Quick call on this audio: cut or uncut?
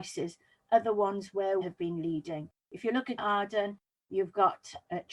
cut